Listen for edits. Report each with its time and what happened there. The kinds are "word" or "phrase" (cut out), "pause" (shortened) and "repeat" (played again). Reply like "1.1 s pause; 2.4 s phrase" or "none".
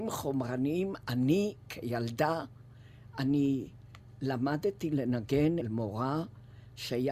5.6 s word